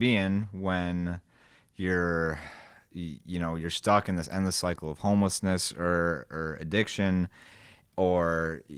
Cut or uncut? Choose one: uncut